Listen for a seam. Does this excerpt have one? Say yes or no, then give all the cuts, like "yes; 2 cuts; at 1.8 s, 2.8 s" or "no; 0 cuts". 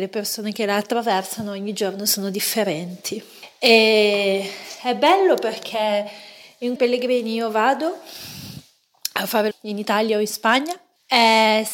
yes; 2 cuts; at 6.8 s, 9.5 s